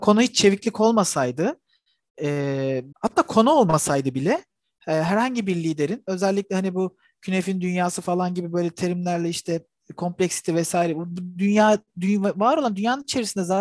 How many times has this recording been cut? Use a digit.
1